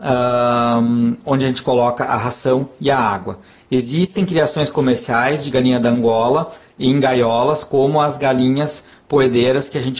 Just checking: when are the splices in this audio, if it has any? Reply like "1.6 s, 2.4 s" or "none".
none